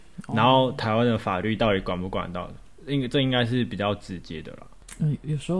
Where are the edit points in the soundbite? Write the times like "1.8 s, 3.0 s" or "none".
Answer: none